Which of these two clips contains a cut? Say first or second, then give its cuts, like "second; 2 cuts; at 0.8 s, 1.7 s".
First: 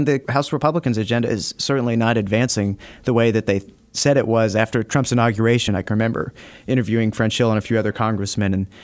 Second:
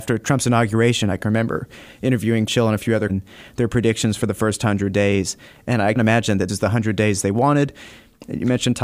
second; 4 cuts; at 2.5 s, 3.1 s, 6.0 s, 6.5 s